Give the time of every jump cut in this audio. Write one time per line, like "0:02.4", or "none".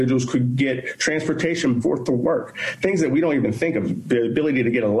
0:01.8